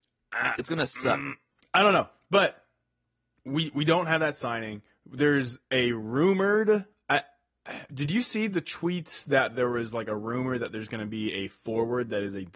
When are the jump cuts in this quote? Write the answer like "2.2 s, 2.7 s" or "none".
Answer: none